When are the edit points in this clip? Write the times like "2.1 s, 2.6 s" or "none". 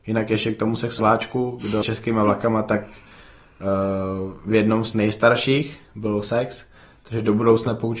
1.0 s, 1.8 s, 4.9 s